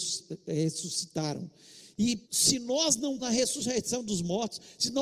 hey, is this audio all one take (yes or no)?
no